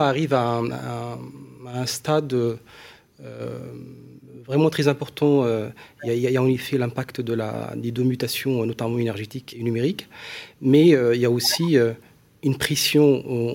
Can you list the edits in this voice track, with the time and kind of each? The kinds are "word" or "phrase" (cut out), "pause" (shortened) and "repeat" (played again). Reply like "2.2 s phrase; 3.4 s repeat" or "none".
9.5 s word